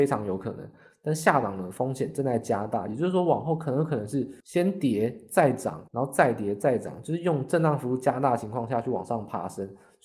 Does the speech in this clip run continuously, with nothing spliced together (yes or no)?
no